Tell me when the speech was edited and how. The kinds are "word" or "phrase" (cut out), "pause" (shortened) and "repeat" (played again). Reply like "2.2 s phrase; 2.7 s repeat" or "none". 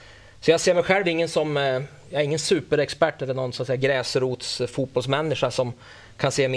none